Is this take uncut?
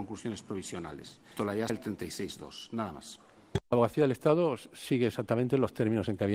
no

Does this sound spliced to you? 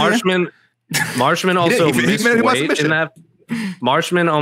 no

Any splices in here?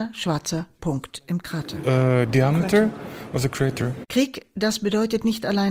no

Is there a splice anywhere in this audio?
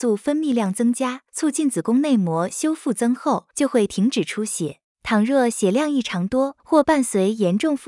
yes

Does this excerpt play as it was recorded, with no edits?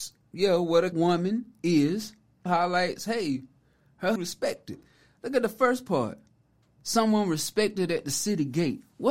no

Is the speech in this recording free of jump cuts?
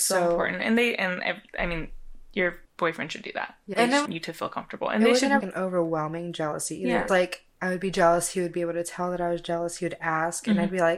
no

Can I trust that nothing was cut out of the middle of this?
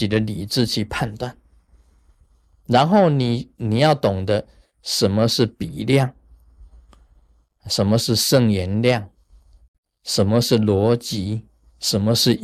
yes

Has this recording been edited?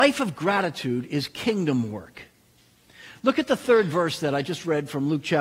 no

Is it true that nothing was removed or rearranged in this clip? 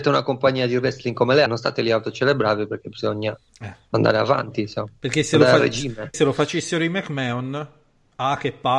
no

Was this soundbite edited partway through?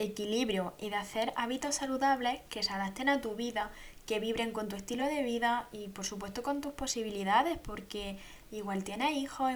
no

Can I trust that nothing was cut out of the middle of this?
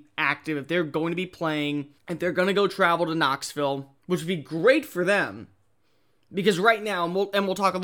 no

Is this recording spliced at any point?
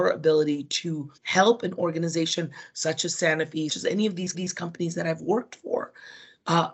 yes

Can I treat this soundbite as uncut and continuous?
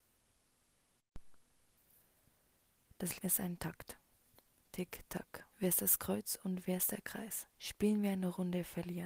no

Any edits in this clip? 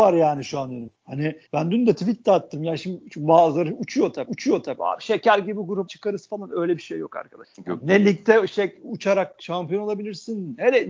yes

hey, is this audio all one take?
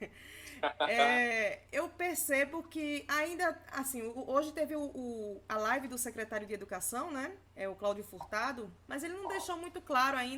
no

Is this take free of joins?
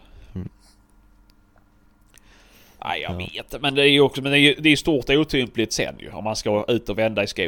yes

